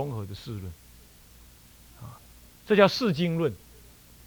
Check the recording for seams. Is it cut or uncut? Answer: uncut